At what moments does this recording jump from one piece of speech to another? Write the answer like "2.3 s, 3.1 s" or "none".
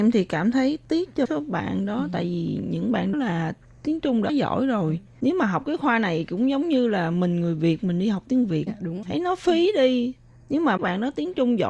1.3 s, 3.1 s, 4.3 s, 8.7 s, 9.0 s, 10.8 s